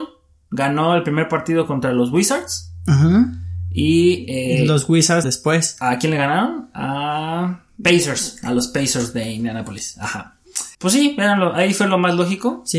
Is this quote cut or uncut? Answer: cut